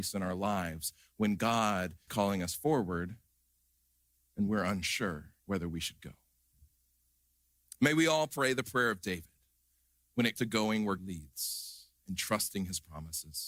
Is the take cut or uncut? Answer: cut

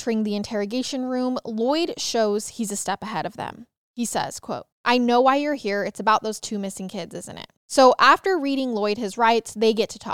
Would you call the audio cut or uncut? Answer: cut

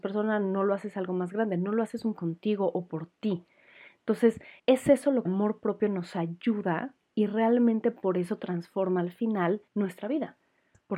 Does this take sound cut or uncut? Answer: cut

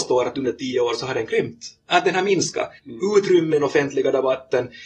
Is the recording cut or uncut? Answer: cut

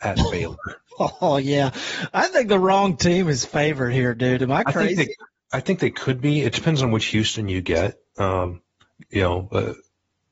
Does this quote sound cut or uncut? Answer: uncut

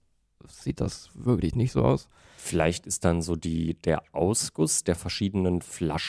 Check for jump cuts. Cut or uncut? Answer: uncut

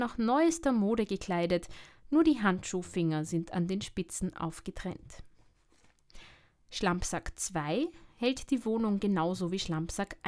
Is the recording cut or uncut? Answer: uncut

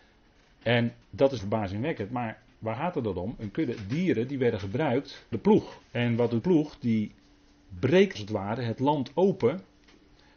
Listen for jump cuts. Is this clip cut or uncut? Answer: cut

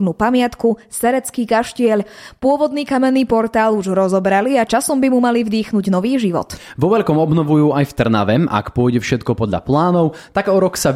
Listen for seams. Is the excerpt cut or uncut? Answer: uncut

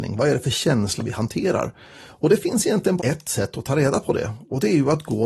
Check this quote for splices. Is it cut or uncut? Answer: cut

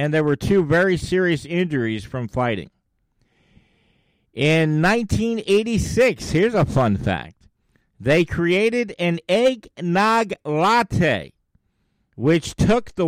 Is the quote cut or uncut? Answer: uncut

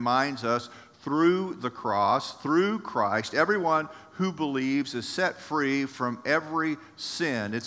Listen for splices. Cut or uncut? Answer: uncut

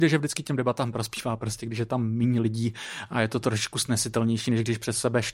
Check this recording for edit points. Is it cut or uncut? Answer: uncut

